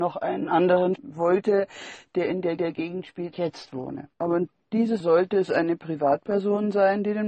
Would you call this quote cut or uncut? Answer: cut